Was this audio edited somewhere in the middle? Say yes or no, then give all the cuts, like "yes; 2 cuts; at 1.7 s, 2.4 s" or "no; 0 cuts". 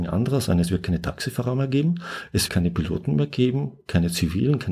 yes; 1 cut; at 2.5 s